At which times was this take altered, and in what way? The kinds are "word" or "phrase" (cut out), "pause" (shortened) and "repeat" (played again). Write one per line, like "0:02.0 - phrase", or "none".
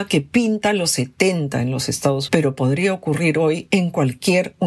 0:02.3 - word